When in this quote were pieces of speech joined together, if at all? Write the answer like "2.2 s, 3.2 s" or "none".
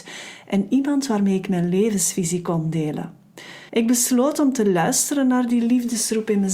3.7 s

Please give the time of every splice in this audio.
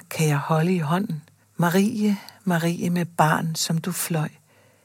1.4 s

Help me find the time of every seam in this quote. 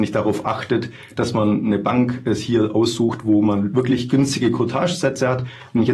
none

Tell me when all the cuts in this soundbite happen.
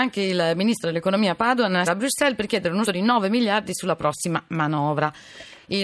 1.9 s, 2.8 s

